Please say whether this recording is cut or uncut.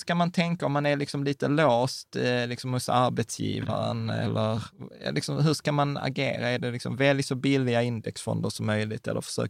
uncut